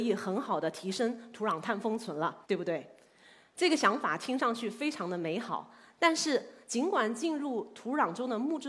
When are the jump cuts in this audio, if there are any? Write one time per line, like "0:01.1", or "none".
0:02.4

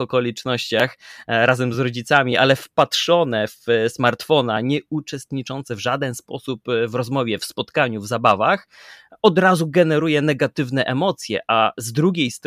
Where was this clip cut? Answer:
none

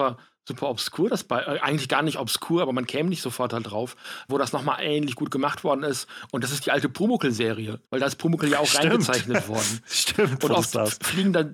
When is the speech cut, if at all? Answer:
0:04.3
0:07.9

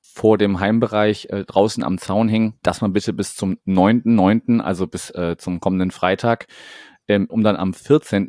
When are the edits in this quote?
0:02.6
0:07.3

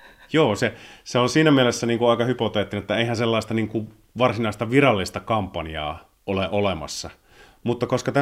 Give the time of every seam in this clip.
0:06.2

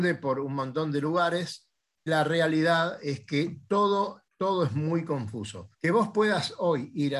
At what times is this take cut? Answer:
0:02.1
0:04.3
0:05.7

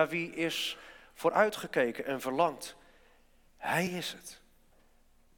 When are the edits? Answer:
none

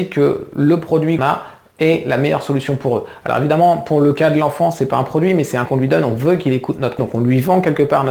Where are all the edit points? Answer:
0:01.2
0:05.7
0:07.0

